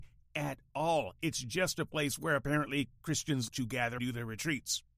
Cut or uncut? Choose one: cut